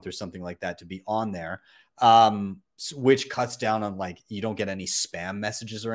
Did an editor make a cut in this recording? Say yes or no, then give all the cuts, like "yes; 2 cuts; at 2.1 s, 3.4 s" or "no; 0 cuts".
no; 0 cuts